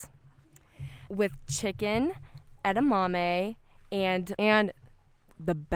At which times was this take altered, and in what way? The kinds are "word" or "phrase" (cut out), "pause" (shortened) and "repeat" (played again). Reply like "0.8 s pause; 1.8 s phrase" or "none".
1.1 s word; 4.4 s word